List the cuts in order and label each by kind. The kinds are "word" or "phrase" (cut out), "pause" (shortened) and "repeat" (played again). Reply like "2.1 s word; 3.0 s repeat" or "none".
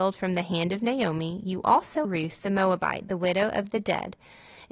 2.0 s word